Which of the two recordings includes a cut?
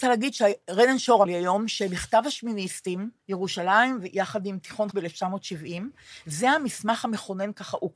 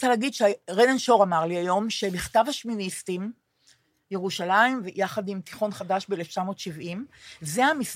first; 3 cuts; at 1.3 s, 3.2 s, 4.9 s

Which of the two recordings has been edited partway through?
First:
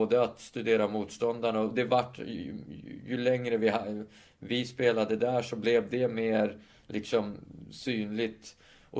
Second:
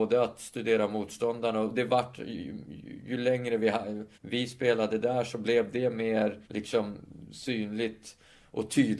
second; 2 cuts; at 4.1 s, 6.4 s

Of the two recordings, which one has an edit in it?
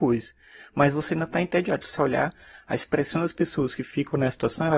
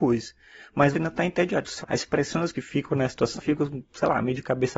second; 4 cuts; at 0.9 s, 1.8 s, 2.5 s, 3.4 s

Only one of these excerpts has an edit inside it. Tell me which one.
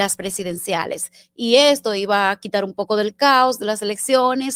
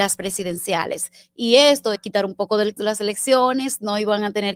second; 2 cuts; at 2.0 s, 2.8 s

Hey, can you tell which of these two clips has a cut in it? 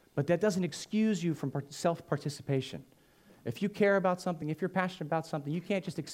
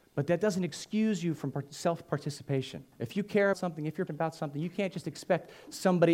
second; 3 cuts; at 2.9 s, 3.5 s, 4.1 s

